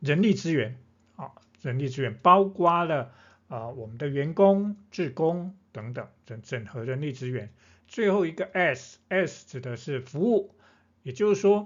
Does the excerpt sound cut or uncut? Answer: uncut